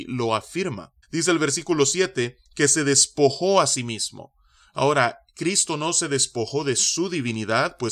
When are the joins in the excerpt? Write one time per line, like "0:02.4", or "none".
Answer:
0:01.0
0:02.5